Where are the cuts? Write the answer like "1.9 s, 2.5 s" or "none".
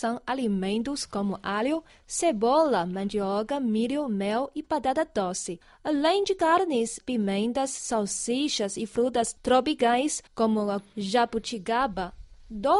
7.0 s, 10.3 s, 10.9 s